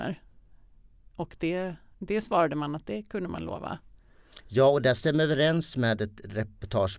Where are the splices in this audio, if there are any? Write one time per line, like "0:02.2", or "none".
0:01.9